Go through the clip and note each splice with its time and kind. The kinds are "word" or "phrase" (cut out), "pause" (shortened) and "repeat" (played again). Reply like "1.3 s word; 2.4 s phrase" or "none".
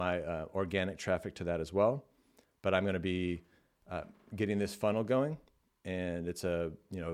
none